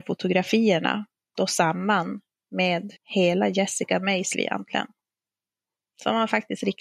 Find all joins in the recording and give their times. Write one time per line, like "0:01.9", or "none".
0:01.4
0:03.0
0:04.3